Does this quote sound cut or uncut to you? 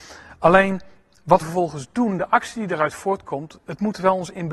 cut